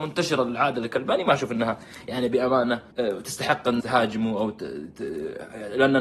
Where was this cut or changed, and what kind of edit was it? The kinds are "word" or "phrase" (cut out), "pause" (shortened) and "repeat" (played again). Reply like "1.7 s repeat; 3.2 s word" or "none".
2.9 s pause; 3.8 s word